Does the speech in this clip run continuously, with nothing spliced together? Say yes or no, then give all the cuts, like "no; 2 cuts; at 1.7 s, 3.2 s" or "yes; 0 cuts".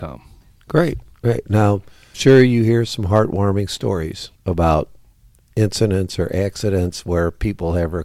no; 2 cuts; at 2.1 s, 4.3 s